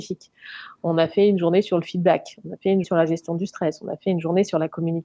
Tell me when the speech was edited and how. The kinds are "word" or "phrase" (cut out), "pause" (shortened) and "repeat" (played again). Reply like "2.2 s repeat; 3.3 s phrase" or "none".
2.8 s word